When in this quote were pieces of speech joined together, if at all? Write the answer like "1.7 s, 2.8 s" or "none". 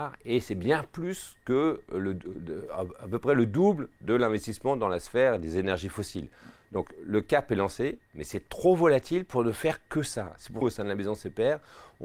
10.6 s

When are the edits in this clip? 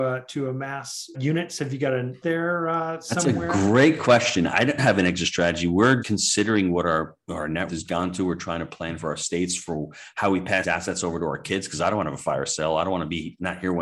1.1 s, 2.2 s, 4.8 s, 6.0 s, 7.7 s, 10.6 s

